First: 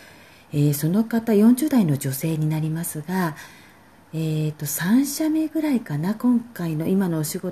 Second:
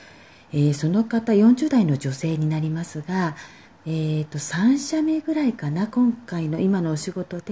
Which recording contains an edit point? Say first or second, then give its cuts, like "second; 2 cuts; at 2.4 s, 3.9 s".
second; 1 cut; at 3.7 s